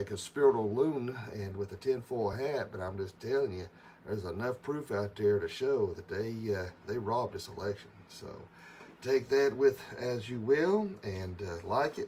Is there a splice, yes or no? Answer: no